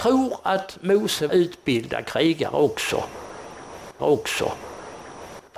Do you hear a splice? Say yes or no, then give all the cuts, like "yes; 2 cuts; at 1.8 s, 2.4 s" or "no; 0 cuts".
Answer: yes; 2 cuts; at 1.3 s, 4.0 s